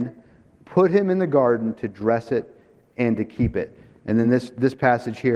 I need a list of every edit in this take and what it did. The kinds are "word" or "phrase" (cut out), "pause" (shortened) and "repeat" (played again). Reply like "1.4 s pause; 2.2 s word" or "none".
none